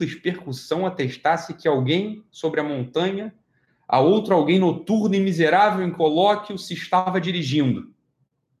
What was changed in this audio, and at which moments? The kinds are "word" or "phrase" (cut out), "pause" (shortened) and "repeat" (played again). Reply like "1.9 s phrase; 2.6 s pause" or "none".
none